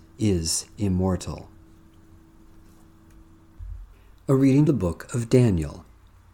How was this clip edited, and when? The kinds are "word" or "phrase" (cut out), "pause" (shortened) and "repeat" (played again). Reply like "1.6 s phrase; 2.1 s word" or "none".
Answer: 3.9 s pause; 4.7 s word